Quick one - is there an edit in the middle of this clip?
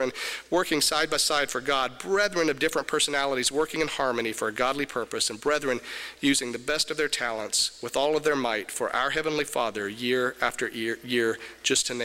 no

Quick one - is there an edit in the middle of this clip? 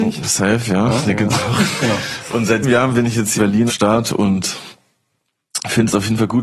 yes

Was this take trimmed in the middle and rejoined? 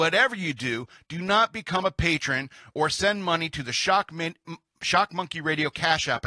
no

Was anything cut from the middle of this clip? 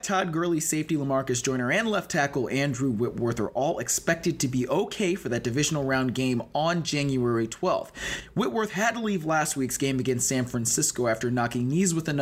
no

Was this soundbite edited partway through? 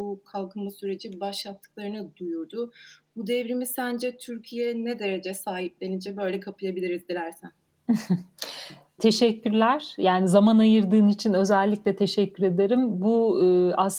yes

